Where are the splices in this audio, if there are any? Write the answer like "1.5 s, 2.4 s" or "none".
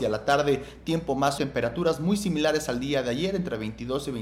1.4 s